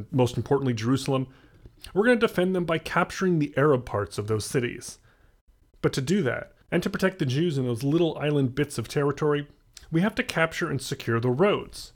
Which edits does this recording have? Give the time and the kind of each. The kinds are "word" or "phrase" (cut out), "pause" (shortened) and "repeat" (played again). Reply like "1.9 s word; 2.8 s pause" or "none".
6.6 s pause